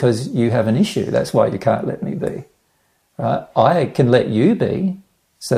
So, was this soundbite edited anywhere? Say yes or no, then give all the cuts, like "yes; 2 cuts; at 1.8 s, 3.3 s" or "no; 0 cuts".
no; 0 cuts